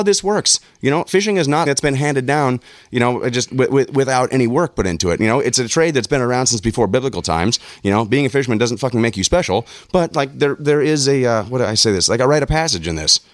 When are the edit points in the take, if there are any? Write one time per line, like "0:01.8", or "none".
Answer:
0:01.7
0:03.5

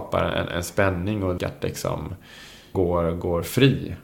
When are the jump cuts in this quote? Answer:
0:01.4
0:02.7

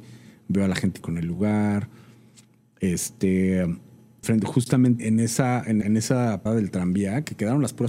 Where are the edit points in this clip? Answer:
0:01.0
0:04.2
0:05.0
0:05.8
0:06.5

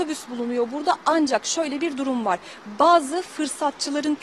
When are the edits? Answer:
none

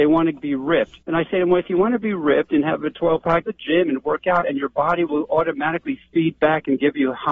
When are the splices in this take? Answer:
0:01.0
0:03.4

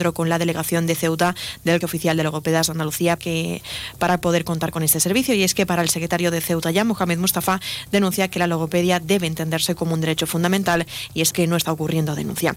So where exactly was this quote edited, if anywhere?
0:01.8
0:03.2
0:11.3

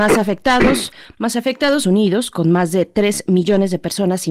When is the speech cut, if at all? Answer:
0:01.8

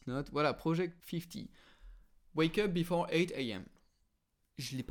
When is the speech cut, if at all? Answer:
0:01.0

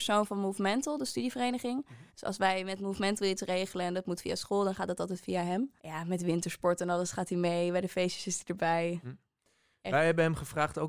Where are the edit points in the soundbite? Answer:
0:02.1
0:05.8

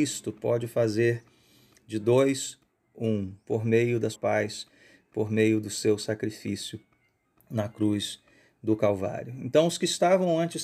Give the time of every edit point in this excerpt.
0:04.1

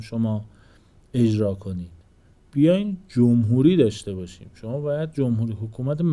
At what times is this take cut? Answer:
none

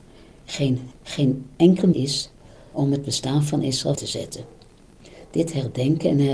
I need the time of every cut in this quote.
0:00.9
0:01.9
0:02.7
0:04.0

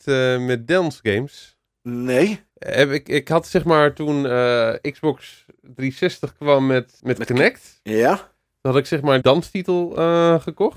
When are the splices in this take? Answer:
0:02.5
0:07.0
0:09.2

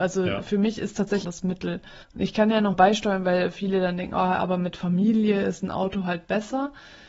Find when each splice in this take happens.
0:01.2
0:02.0
0:02.7

